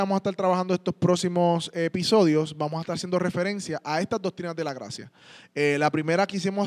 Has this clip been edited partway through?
no; 0 cuts

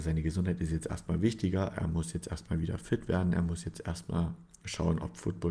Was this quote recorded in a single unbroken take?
yes; 0 cuts

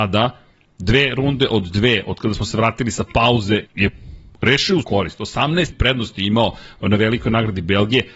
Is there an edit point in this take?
yes; 3 cuts; at 3.7 s, 4.8 s, 5.7 s

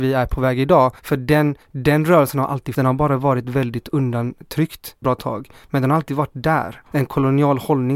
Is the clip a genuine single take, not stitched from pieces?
no; 5 cuts; at 1.0 s, 1.6 s, 2.7 s, 5.0 s, 6.9 s

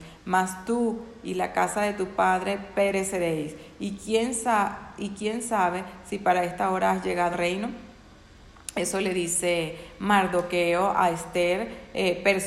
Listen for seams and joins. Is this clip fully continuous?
no; 1 cut; at 7.3 s

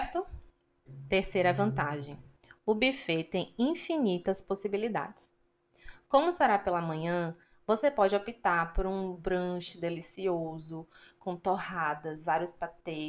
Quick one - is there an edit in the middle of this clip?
no; 0 cuts

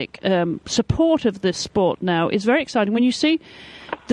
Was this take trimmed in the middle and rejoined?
no; 0 cuts

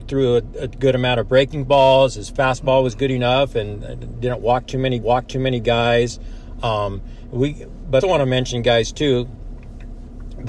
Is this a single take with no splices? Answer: no; 2 cuts; at 5.0 s, 8.0 s

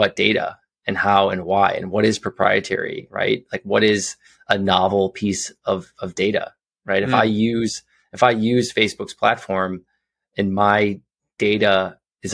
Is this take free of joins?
yes; 0 cuts

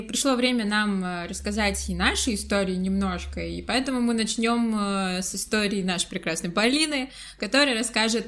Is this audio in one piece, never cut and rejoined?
yes; 0 cuts

